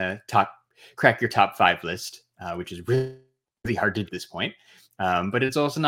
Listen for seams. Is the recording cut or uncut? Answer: cut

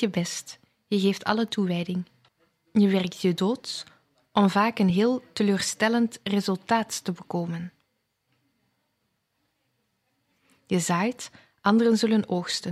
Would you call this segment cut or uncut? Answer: uncut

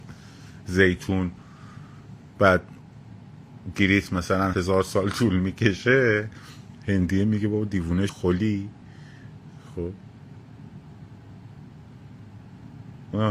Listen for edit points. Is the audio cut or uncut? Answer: cut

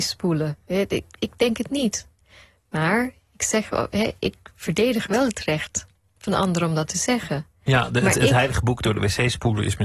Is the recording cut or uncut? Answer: uncut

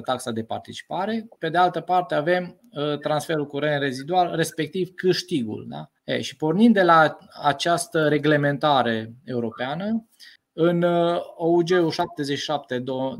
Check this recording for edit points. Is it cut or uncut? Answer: cut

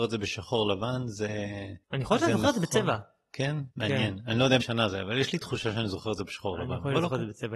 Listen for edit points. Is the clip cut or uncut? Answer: cut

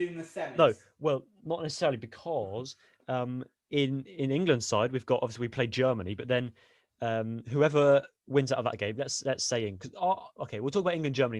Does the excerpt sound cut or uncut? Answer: uncut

